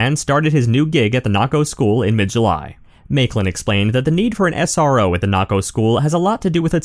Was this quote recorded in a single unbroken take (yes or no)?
yes